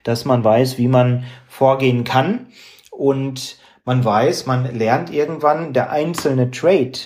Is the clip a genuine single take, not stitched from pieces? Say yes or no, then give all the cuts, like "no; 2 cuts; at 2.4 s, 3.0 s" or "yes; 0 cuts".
yes; 0 cuts